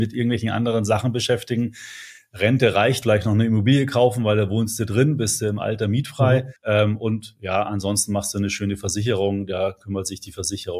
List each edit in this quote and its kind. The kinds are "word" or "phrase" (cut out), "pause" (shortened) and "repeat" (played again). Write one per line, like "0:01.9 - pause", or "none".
0:03.0 - phrase
0:06.6 - pause